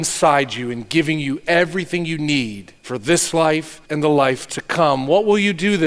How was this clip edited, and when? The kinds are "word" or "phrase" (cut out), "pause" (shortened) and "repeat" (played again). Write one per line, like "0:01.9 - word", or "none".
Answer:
0:02.8 - pause
0:03.8 - pause